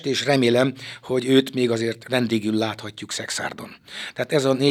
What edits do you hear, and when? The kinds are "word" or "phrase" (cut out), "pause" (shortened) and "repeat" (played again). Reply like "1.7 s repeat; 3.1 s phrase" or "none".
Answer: none